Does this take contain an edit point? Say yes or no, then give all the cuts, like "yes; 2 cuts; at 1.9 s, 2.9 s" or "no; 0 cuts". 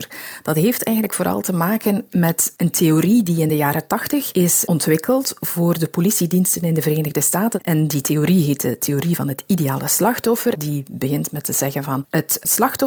no; 0 cuts